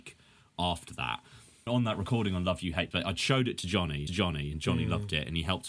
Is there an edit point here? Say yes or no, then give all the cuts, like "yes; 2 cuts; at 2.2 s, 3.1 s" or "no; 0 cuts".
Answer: yes; 3 cuts; at 1.7 s, 2.9 s, 4.1 s